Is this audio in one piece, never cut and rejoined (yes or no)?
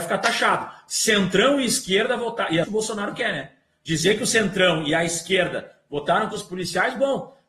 no